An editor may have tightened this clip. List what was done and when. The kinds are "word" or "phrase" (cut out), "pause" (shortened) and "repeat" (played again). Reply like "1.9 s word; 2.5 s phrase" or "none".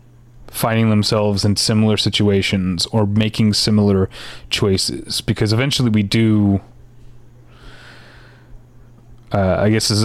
none